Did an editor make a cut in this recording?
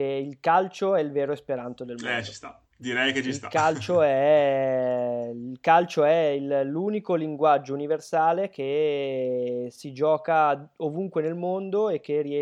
yes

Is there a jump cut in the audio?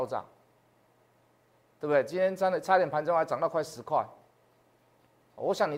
no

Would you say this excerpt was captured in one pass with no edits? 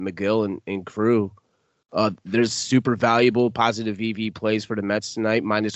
yes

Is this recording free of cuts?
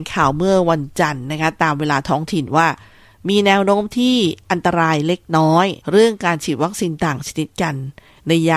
no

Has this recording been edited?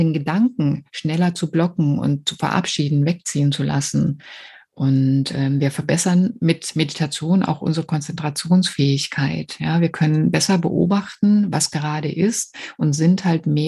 no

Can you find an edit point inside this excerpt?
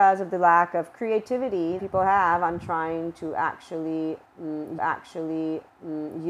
yes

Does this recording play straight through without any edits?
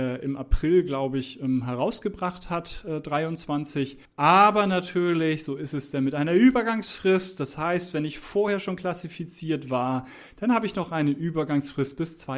no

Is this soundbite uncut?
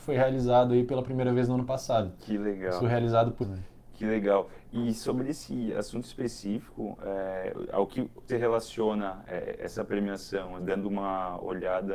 no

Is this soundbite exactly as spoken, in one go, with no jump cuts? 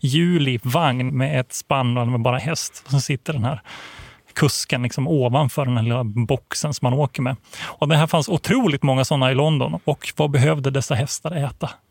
no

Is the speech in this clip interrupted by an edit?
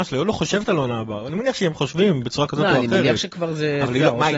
no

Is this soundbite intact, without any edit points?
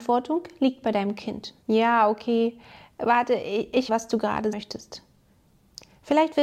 no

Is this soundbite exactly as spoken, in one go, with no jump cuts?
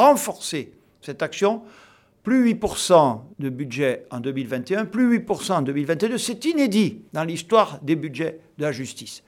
no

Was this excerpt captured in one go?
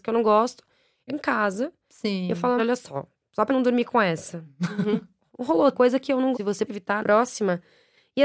no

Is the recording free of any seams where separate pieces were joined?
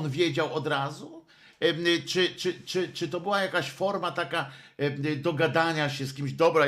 yes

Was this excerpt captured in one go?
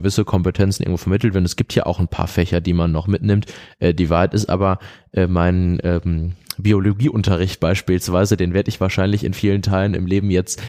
yes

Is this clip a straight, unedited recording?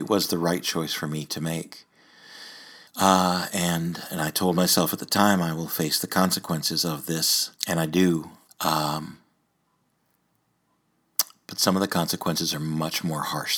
no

